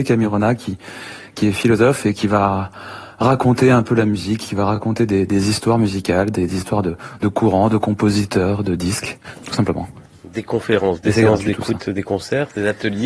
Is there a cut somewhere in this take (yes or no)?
no